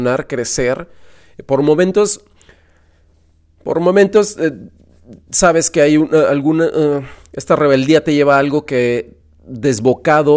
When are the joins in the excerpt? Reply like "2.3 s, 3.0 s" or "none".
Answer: none